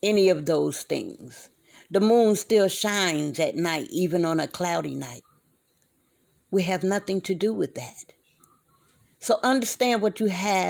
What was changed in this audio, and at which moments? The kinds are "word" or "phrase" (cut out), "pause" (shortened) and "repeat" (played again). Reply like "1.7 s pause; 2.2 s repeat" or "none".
none